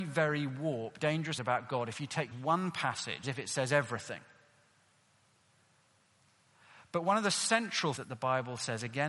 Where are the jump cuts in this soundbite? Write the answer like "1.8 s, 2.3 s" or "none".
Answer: 1.0 s, 1.4 s, 2.3 s, 3.2 s, 8.0 s